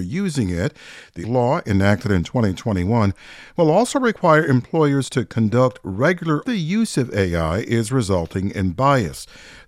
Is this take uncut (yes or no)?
no